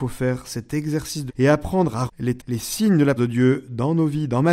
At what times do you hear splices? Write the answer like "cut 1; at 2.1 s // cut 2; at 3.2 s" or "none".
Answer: cut 1; at 1.3 s // cut 2; at 2.1 s // cut 3; at 2.4 s // cut 4; at 3.2 s